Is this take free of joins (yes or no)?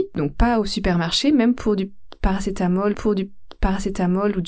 no